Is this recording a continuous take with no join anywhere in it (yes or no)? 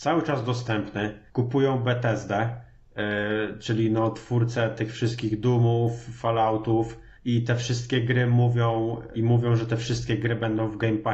no